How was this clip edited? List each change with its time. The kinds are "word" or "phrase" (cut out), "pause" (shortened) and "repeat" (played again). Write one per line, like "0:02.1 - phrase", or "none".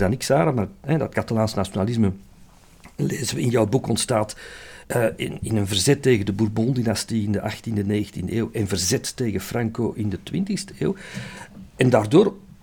0:04.8 - pause

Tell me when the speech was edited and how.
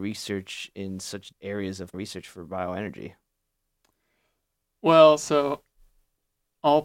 0:01.3 - word
0:01.9 - word

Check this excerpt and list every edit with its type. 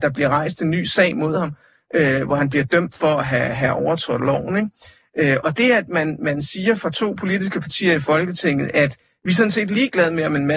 none

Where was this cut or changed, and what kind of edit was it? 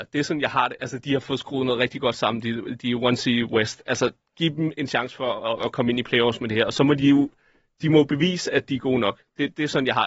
none

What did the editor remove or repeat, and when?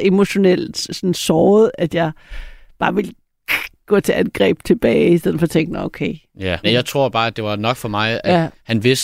0:01.1 - word
0:06.6 - word

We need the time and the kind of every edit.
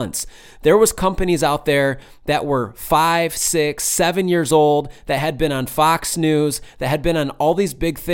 none

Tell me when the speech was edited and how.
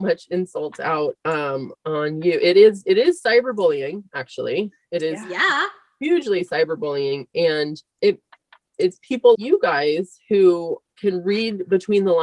0:01.7 - word
0:08.0 - word
0:09.3 - word

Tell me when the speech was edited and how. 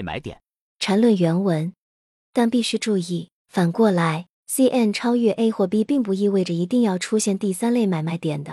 none

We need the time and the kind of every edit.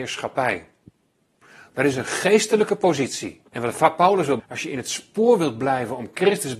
0:03.5 - pause
0:04.4 - word

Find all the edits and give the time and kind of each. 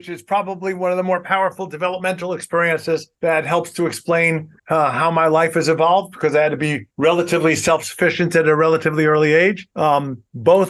0:03.1 - pause
0:04.6 - pause
0:06.9 - pause
0:09.7 - pause

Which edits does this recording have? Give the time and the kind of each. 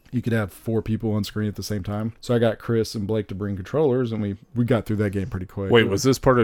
0:02.2 - pause
0:04.4 - pause

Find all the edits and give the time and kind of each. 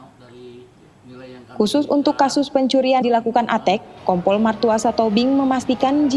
0:03.0 - word
0:04.0 - pause

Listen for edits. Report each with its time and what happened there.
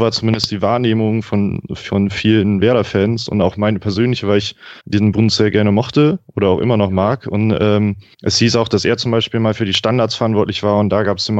0:04.8 - pause
0:08.1 - pause

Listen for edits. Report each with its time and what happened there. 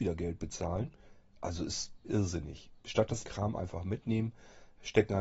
0:02.0 - word
0:03.2 - word

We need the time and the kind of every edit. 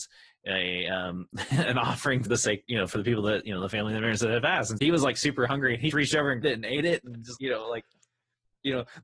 0:02.3 - word
0:04.8 - word
0:05.9 - word
0:06.4 - word
0:07.4 - word

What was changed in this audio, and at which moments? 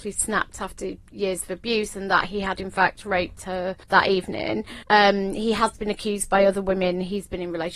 0:03.8 - pause
0:04.8 - pause

